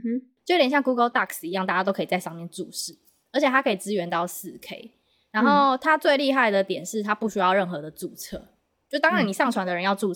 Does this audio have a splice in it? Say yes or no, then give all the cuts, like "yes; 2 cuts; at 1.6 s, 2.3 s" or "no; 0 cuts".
no; 0 cuts